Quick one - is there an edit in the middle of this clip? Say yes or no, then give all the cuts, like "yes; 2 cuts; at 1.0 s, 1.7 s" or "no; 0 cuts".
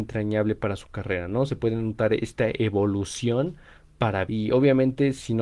yes; 1 cut; at 4.3 s